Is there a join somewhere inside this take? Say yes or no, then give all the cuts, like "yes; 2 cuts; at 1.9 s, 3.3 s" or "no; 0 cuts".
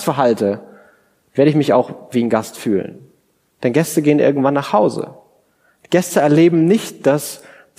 no; 0 cuts